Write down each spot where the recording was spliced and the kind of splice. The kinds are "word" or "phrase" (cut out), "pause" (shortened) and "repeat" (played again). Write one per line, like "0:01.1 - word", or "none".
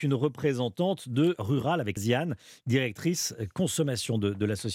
0:01.4 - word
0:02.0 - word